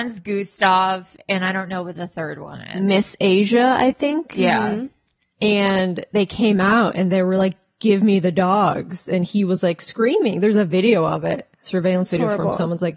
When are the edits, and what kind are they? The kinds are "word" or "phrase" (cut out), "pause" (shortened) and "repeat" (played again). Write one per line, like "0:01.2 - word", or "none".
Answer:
none